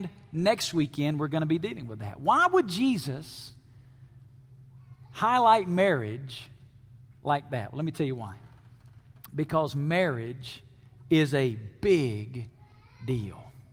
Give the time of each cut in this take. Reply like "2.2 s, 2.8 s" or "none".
none